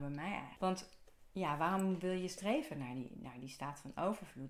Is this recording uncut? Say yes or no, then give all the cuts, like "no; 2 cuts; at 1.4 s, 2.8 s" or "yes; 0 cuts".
yes; 0 cuts